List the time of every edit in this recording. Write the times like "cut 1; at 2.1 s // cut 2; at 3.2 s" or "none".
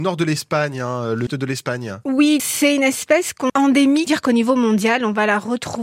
cut 1; at 1.3 s // cut 2; at 2.4 s // cut 3; at 3.5 s // cut 4; at 4.1 s